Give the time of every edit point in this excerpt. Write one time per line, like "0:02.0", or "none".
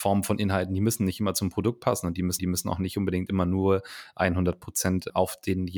0:02.4